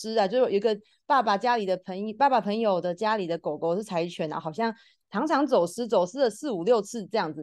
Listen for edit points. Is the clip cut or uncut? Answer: uncut